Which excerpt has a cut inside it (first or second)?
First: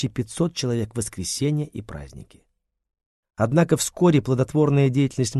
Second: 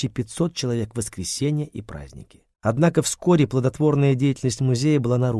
second